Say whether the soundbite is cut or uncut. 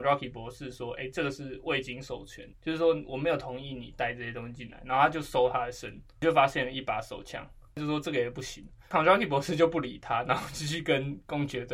uncut